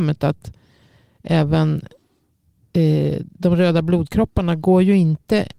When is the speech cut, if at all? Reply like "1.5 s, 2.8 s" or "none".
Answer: none

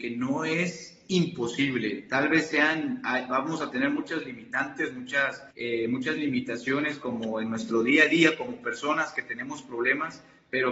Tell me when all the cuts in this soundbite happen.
5.5 s

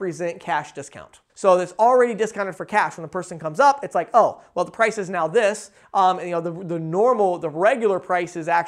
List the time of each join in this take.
1.3 s

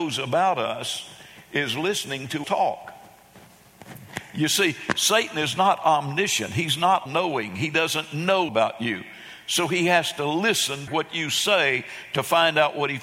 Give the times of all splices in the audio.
2.4 s, 7.1 s, 8.5 s, 10.9 s

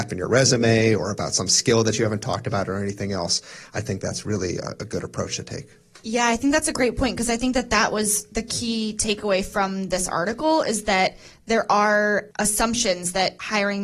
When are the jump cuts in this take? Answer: none

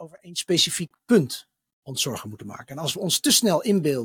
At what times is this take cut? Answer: none

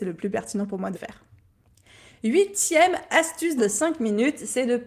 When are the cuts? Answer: 0.9 s, 3.6 s

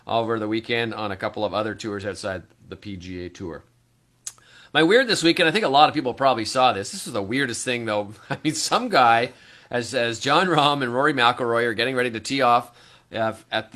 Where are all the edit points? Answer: none

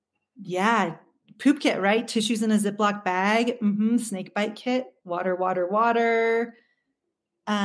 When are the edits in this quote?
none

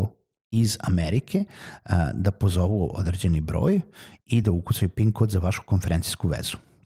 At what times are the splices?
none

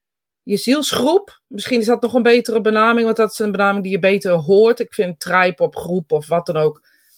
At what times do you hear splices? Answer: none

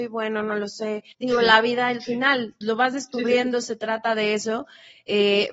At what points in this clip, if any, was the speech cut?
1.1 s, 2.6 s

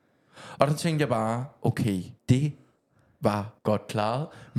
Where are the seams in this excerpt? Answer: 2.2 s, 3.6 s

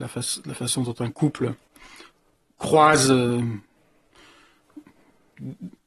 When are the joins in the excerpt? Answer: none

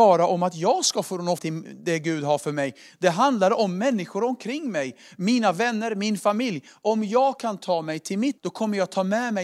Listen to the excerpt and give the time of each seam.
1.4 s, 8.4 s

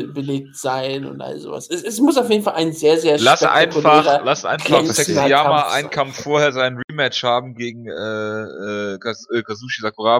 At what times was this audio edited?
none

